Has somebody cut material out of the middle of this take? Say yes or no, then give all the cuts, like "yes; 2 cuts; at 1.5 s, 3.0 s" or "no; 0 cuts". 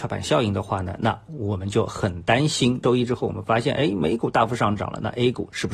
no; 0 cuts